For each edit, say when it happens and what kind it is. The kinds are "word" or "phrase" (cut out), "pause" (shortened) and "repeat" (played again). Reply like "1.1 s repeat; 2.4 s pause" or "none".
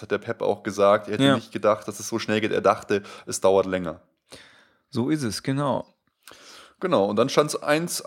none